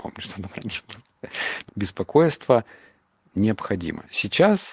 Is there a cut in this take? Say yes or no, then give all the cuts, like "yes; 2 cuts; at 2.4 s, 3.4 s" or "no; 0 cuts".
yes; 1 cut; at 1.7 s